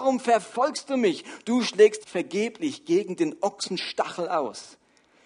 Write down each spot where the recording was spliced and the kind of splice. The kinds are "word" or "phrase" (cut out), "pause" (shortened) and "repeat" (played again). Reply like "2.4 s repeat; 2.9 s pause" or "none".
2.0 s word